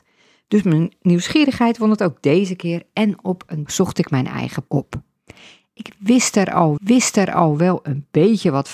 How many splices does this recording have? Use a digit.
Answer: 3